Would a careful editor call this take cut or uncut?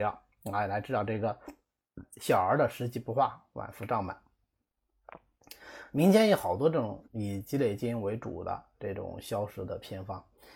cut